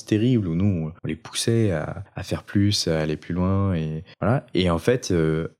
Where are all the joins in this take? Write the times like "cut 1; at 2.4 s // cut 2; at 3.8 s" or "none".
cut 1; at 1.0 s // cut 2; at 2.1 s // cut 3; at 4.1 s